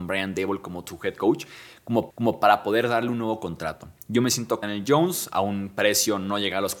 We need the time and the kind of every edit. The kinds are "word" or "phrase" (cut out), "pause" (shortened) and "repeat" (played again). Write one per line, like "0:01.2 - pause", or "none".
0:02.1 - repeat
0:04.0 - pause
0:04.6 - phrase